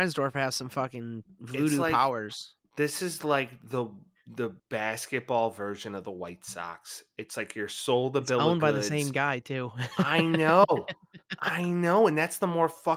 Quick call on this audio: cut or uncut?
cut